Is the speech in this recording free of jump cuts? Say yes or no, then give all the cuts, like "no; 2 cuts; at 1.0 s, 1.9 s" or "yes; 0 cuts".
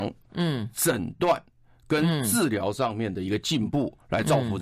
yes; 0 cuts